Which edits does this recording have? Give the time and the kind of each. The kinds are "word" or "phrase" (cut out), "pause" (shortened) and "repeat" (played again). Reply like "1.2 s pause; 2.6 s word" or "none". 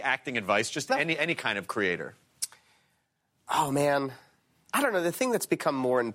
none